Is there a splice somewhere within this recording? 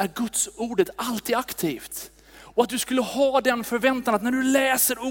no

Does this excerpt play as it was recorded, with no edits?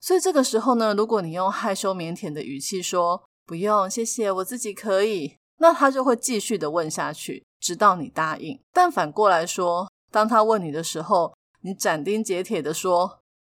no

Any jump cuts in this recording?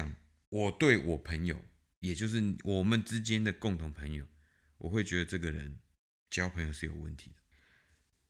no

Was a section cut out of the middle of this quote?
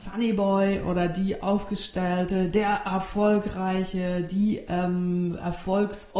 no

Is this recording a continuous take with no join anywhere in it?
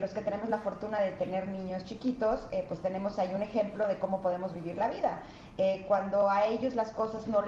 yes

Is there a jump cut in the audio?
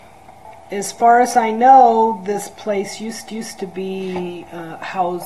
yes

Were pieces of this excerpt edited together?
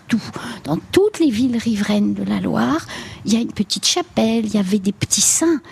no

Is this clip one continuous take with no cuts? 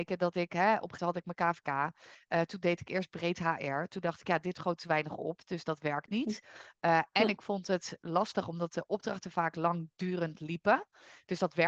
no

